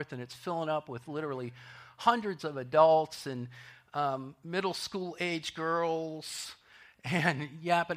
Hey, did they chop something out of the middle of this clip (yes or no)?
no